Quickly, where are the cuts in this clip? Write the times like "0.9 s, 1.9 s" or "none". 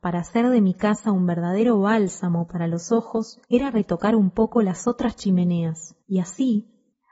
3.4 s, 6.0 s